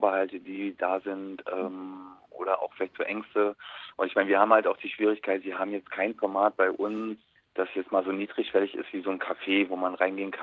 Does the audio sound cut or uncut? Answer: uncut